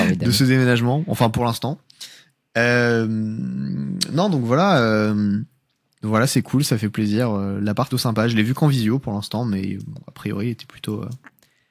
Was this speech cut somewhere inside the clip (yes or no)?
yes